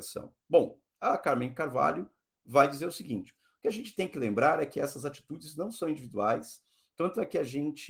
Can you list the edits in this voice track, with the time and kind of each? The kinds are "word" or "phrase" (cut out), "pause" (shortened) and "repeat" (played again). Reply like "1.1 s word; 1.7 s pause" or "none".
none